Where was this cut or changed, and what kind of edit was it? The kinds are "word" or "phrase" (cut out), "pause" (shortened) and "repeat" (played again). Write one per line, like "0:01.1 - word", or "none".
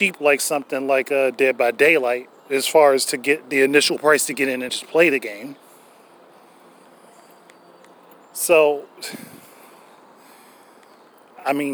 0:04.7 - word